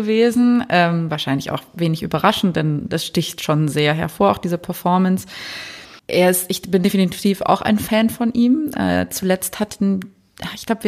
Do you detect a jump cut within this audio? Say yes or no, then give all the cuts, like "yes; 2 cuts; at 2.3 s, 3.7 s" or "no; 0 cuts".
yes; 1 cut; at 6.0 s